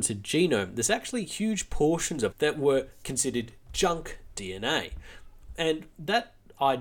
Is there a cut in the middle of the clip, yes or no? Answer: yes